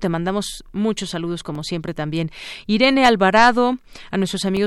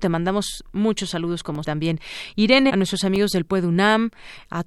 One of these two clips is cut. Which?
second; 2 cuts; at 1.6 s, 2.7 s

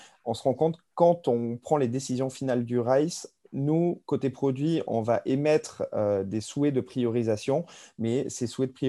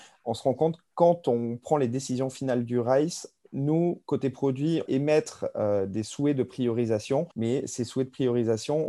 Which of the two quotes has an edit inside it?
second; 2 cuts; at 4.9 s, 7.3 s

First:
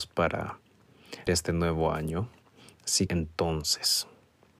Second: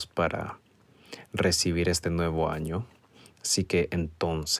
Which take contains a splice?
first; 2 cuts; at 1.3 s, 3.1 s

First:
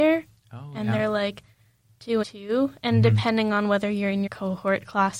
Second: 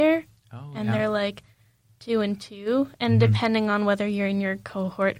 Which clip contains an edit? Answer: first; 2 cuts; at 2.2 s, 4.3 s

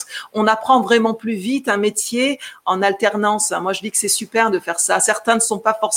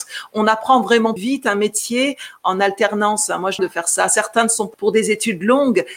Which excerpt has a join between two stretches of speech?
second; 3 cuts; at 1.2 s, 3.6 s, 4.7 s

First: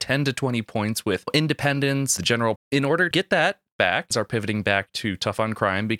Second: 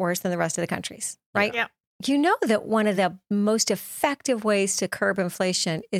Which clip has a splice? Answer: first; 4 cuts; at 2.2 s, 2.6 s, 3.1 s, 4.1 s

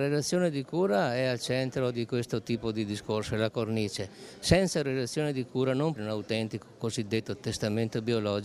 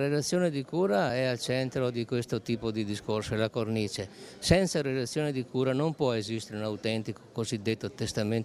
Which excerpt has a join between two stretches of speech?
first; 1 cut; at 6.0 s

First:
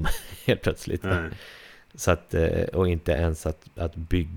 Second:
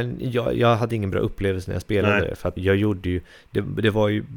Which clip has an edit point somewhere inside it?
second; 1 cut; at 2.6 s

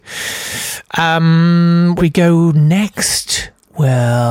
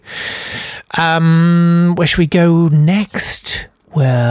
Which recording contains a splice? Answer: first; 1 cut; at 2.0 s

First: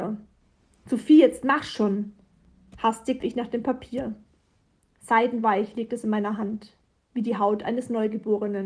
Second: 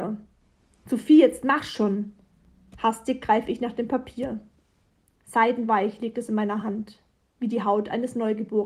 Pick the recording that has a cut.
first; 1 cut; at 3.2 s

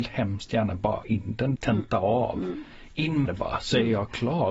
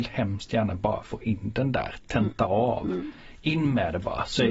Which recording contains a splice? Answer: first; 3 cuts; at 1.0 s, 1.6 s, 3.3 s

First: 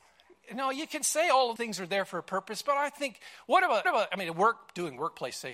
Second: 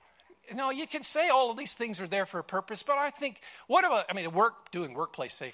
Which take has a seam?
first; 2 cuts; at 1.6 s, 3.8 s

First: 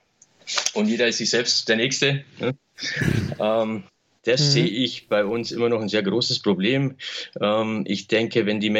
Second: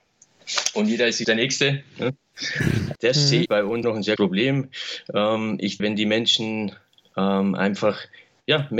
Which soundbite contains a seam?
second; 6 cuts; at 1.2 s, 3.0 s, 3.5 s, 3.8 s, 4.2 s, 5.8 s

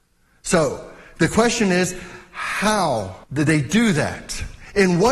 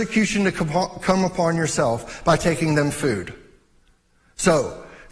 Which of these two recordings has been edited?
first; 1 cut; at 3.2 s

